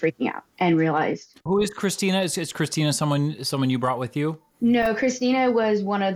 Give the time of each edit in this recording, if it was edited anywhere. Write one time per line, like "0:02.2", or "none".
0:01.5